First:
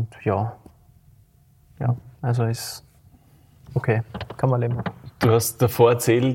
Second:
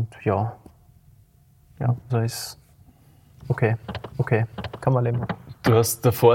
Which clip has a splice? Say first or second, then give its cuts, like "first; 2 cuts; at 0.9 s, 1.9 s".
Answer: second; 2 cuts; at 2.1 s, 4.1 s